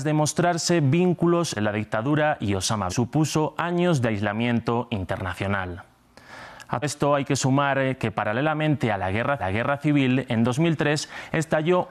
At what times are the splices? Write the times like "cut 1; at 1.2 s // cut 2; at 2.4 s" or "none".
cut 1; at 1.6 s // cut 2; at 2.9 s // cut 3; at 6.8 s // cut 4; at 9.4 s